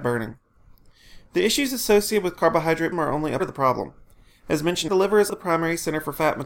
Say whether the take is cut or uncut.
cut